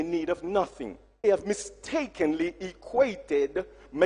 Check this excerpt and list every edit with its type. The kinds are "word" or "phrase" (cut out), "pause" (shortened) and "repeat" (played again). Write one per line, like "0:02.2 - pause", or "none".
0:01.2 - word